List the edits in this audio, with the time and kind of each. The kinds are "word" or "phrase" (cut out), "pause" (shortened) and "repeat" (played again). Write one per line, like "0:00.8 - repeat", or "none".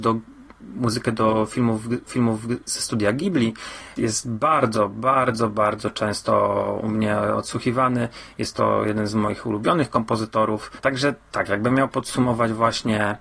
0:02.1 - repeat
0:03.9 - word

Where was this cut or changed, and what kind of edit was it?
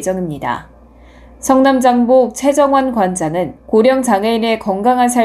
0:03.6 - pause

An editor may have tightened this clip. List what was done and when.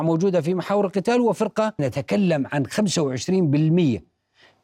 0:01.8 - phrase

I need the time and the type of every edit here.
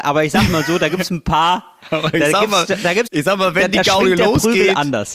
0:03.1 - word

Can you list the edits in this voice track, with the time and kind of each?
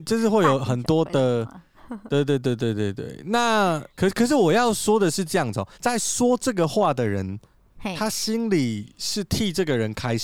0:03.9 - pause
0:05.7 - pause

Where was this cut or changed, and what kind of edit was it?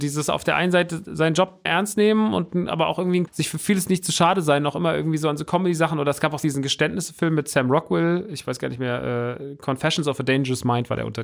0:01.7 - word
0:03.3 - phrase

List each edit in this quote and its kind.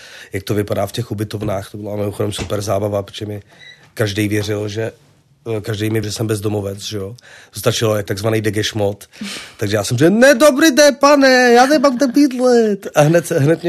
0:06.0 - word
0:08.1 - word

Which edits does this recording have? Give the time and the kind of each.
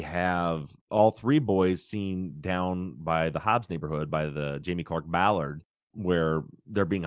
none

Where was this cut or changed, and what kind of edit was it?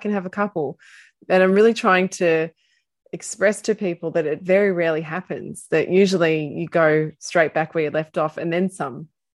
none

